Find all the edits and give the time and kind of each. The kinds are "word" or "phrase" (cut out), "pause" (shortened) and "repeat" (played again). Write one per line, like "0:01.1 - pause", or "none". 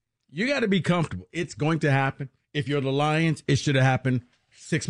none